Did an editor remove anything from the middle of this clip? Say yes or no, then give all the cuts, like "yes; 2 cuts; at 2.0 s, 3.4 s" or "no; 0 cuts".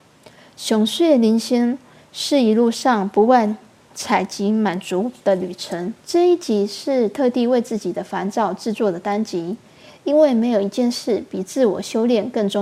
yes; 1 cut; at 6.0 s